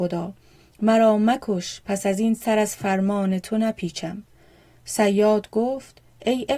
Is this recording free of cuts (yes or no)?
yes